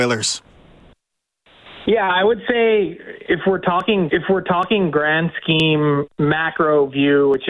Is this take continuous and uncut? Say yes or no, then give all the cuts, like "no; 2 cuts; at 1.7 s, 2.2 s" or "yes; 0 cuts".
no; 1 cut; at 4.1 s